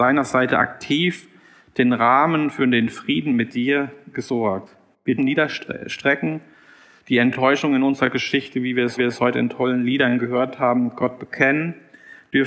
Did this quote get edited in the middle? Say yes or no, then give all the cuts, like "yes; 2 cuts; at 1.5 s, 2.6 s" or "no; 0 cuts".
yes; 2 cuts; at 5.2 s, 9.0 s